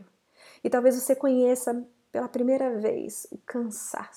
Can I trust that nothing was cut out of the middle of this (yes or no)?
yes